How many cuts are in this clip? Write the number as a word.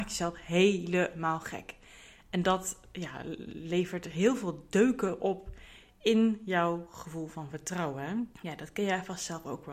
one